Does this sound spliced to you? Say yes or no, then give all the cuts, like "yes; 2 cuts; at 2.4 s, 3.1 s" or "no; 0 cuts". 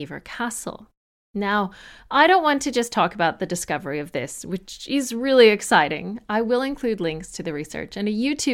no; 0 cuts